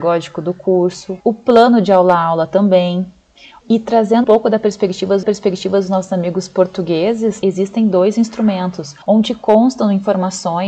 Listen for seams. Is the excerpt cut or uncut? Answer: cut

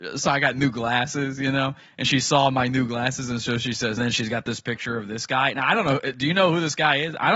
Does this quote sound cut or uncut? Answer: cut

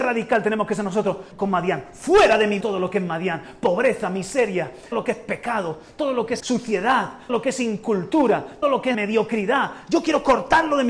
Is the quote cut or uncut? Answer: cut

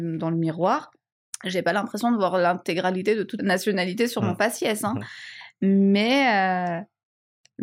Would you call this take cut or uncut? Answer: cut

